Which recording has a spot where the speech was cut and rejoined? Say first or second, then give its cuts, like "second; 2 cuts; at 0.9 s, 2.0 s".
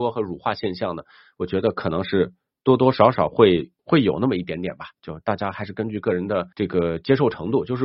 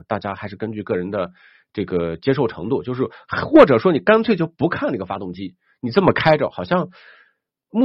first; 2 cuts; at 3.8 s, 6.5 s